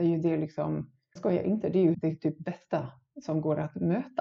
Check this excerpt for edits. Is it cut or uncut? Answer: cut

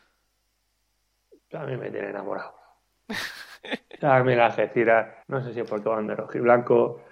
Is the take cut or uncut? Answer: cut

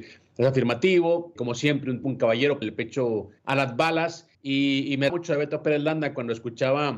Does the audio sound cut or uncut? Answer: cut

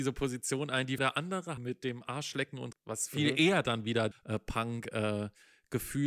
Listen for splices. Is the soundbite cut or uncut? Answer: cut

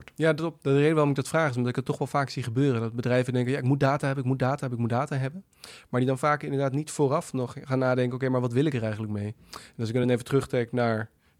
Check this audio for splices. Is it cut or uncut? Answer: uncut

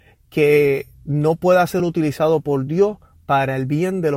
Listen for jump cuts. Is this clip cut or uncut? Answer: uncut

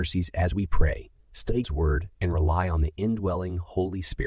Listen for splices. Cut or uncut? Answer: cut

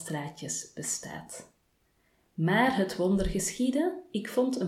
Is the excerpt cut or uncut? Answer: uncut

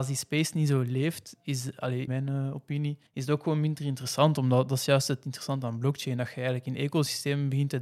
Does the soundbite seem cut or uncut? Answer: cut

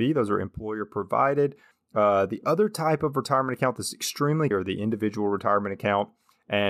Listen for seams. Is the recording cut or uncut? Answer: cut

